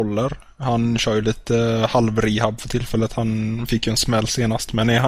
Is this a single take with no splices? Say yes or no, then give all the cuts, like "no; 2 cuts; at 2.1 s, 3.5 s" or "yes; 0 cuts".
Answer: yes; 0 cuts